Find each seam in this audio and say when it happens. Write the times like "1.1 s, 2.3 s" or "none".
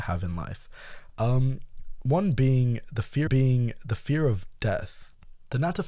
3.3 s